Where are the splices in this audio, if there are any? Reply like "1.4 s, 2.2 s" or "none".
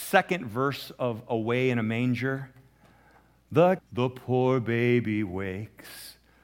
3.8 s